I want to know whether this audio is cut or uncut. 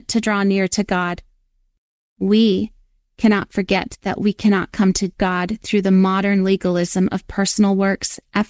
uncut